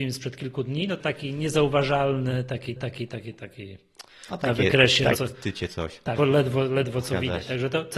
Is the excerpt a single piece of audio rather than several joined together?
no; 4 cuts; at 1.0 s, 2.8 s, 5.1 s, 6.2 s

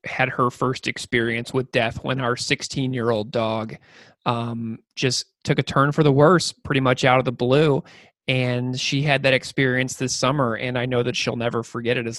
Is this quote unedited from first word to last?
yes; 0 cuts

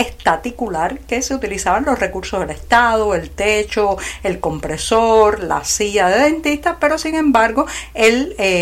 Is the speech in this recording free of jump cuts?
yes; 0 cuts

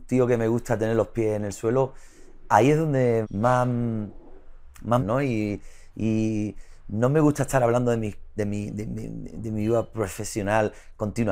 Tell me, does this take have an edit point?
yes; 3 cuts; at 3.2 s, 5.0 s, 8.4 s

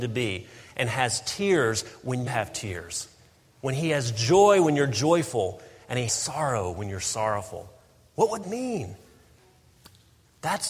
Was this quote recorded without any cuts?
no; 3 cuts; at 2.3 s, 6.1 s, 8.4 s

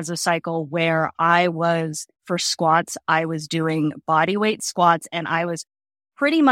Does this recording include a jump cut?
yes; 1 cut; at 2.2 s

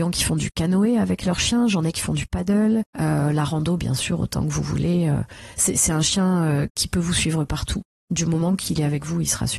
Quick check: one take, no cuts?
yes; 0 cuts

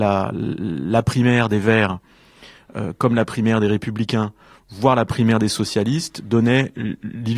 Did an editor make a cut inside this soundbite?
no; 0 cuts

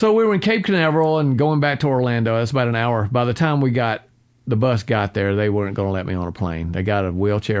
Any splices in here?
no; 0 cuts

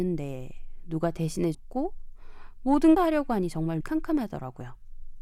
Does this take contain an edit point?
yes; 3 cuts; at 1.5 s, 3.0 s, 3.8 s

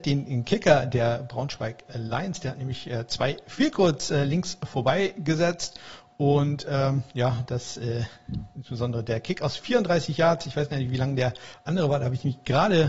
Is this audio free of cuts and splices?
yes; 0 cuts

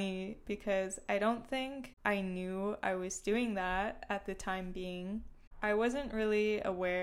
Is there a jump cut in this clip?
no; 0 cuts

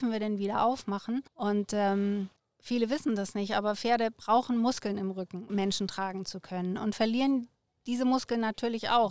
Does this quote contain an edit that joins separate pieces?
yes; 3 cuts; at 1.3 s, 2.4 s, 5.5 s

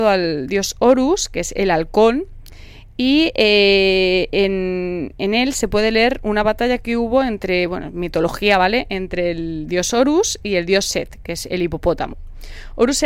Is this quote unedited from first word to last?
yes; 0 cuts

